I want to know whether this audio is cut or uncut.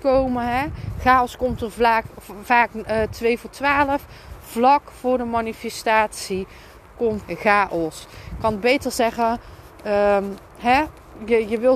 cut